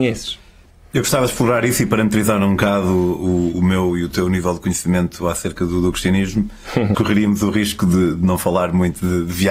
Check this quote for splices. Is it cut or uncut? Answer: cut